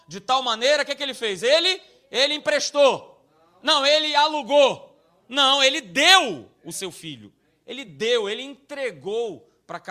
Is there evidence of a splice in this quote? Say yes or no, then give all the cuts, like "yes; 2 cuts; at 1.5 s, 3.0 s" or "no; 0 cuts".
no; 0 cuts